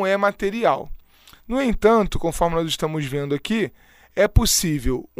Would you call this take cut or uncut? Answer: uncut